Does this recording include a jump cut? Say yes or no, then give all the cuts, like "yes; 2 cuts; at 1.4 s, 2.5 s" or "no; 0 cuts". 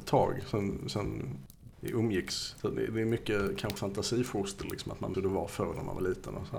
yes; 2 cuts; at 3.8 s, 5.1 s